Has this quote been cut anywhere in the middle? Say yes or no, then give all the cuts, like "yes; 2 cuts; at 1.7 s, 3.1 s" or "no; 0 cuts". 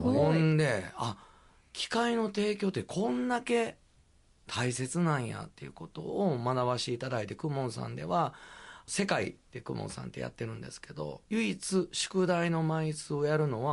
yes; 1 cut; at 11.2 s